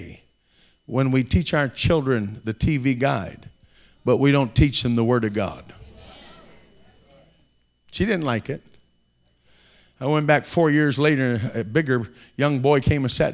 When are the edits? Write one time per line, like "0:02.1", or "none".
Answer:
none